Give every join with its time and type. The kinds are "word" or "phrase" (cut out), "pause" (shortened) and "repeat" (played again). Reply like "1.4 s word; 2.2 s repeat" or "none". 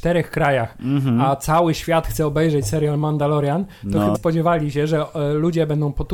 4.1 s word